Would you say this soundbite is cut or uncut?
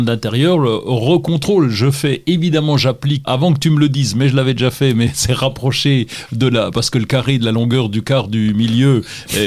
cut